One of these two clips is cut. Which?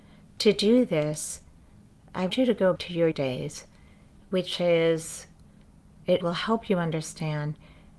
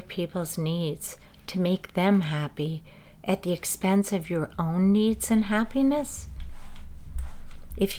first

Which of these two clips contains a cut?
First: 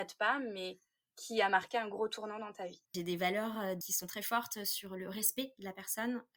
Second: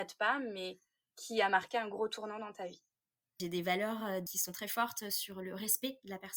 first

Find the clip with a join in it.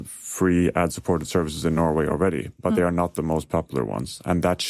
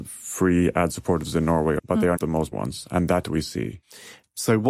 second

